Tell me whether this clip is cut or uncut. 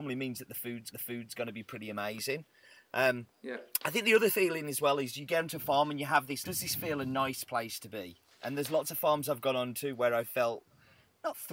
cut